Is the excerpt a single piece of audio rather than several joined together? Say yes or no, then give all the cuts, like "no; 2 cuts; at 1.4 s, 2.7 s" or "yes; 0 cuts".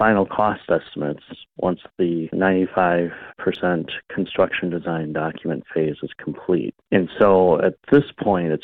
no; 1 cut; at 3.3 s